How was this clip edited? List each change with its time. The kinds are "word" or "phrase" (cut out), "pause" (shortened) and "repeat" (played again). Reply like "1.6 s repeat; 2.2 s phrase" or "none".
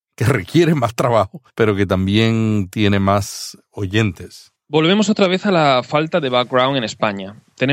none